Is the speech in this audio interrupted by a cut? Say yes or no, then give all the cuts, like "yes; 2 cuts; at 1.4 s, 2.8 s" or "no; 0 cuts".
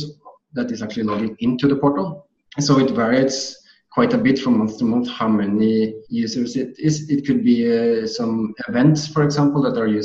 yes; 1 cut; at 6.1 s